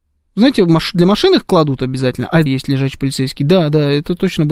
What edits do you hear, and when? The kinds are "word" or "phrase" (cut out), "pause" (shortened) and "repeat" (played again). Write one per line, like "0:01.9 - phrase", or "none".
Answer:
0:02.5 - phrase